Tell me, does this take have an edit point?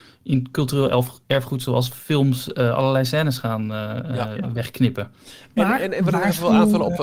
no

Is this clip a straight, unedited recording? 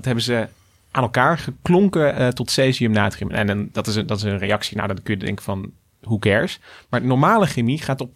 yes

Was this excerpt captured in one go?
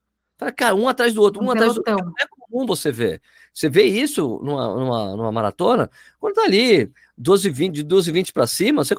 yes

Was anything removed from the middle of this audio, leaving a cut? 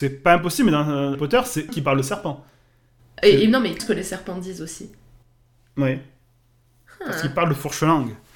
yes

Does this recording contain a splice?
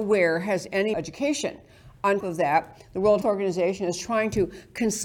yes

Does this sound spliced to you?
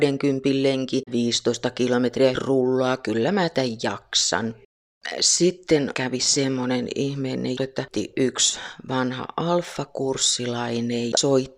yes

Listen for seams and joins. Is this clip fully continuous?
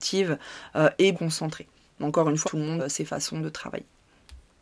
no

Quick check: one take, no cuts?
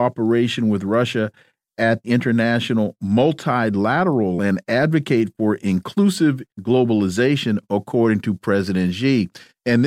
no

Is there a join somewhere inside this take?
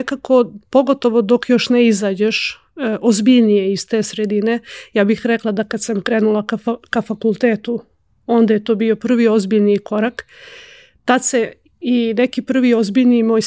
no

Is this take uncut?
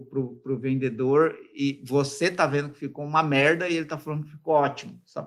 yes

